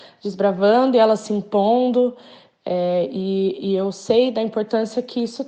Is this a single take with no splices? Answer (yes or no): yes